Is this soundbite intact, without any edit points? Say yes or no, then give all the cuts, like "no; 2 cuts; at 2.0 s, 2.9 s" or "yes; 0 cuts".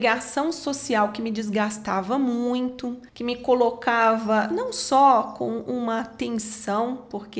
no; 1 cut; at 3.1 s